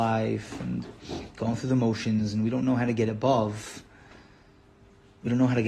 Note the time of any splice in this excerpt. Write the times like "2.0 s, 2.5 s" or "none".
none